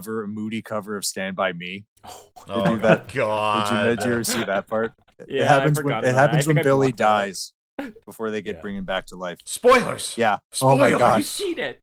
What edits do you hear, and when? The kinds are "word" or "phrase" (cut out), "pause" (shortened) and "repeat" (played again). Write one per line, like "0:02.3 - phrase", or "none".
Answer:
0:10.4 - pause